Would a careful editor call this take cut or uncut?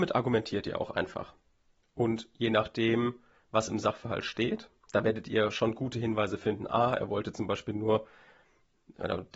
uncut